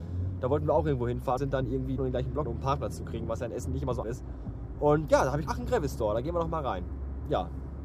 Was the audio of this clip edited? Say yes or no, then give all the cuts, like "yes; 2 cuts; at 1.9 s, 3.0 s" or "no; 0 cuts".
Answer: yes; 6 cuts; at 1.4 s, 2.0 s, 2.5 s, 4.0 s, 5.1 s, 5.5 s